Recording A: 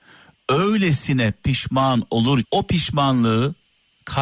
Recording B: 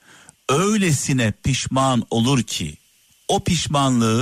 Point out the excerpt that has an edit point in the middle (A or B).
A